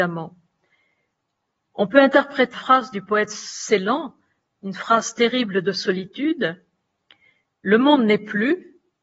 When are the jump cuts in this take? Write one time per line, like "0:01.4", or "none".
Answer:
0:02.5